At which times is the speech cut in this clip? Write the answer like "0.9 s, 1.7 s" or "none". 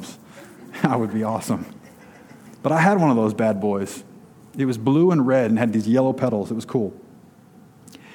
none